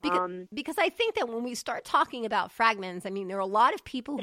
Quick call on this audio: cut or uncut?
uncut